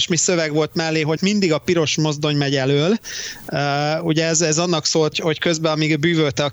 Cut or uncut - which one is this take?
cut